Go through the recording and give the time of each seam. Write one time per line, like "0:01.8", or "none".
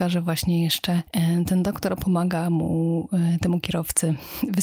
none